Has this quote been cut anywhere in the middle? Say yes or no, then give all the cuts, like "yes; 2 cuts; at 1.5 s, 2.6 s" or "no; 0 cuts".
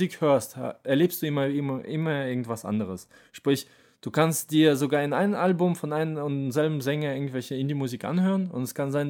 no; 0 cuts